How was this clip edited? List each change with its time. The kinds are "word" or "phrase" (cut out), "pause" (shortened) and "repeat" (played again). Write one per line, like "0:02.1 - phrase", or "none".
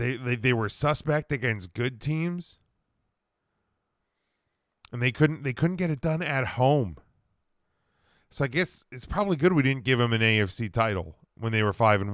none